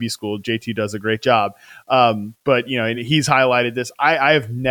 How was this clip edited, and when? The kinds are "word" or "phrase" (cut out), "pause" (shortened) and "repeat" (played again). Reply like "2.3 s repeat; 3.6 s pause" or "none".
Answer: none